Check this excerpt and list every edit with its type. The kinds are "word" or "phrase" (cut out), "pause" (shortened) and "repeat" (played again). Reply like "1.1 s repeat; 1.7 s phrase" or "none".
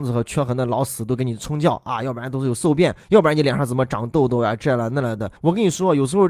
3.0 s pause; 5.4 s pause